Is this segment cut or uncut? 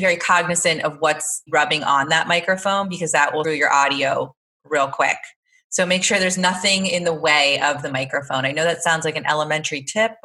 cut